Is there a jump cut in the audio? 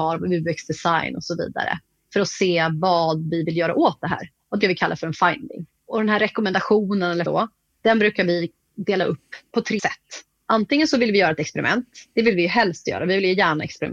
yes; 3 cuts; at 4.6 s, 7.3 s, 9.8 s

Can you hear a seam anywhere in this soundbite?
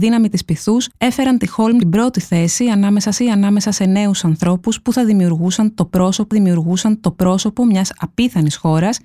yes; 4 cuts; at 0.9 s, 1.8 s, 3.2 s, 6.3 s

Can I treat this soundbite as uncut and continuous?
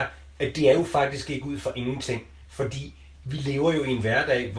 yes; 0 cuts

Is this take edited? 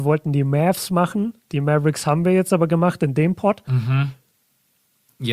no; 0 cuts

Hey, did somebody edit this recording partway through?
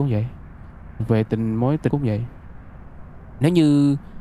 yes; 1 cut; at 1.9 s

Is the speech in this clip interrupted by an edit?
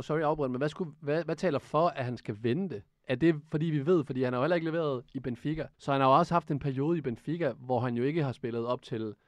yes; 1 cut; at 5.7 s

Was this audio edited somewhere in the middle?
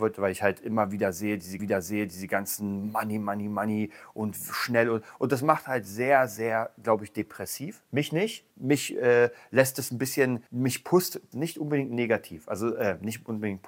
yes; 5 cuts; at 1.6 s, 7.9 s, 8.5 s, 10.5 s, 11.3 s

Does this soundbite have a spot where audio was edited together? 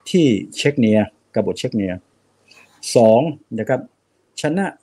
no; 0 cuts

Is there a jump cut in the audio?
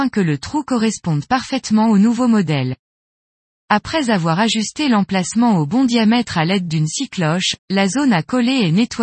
yes; 1 cut; at 7.6 s

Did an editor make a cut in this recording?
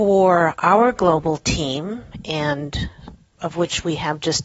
no; 0 cuts

